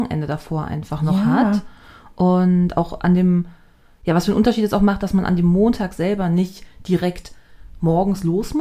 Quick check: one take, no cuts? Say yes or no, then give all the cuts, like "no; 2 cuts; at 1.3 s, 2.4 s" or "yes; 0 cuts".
yes; 0 cuts